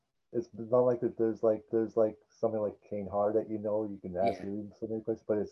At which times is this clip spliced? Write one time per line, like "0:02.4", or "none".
0:01.7